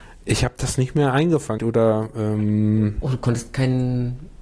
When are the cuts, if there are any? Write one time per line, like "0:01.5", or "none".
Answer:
0:01.6